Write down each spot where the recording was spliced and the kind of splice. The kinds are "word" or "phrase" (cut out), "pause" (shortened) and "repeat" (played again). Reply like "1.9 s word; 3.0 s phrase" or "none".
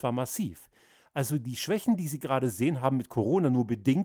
none